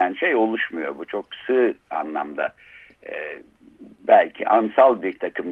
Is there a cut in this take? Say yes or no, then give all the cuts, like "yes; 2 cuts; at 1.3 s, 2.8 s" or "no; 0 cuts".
no; 0 cuts